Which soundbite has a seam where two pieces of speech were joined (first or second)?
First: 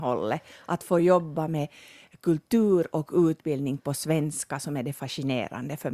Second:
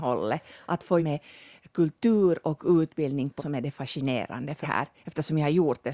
second